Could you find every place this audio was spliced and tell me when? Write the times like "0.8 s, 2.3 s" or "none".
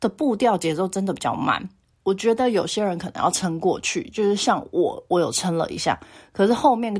none